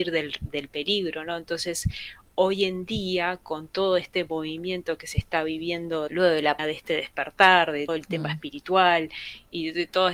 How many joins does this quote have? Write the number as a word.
three